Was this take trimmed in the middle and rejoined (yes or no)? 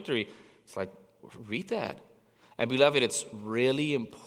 no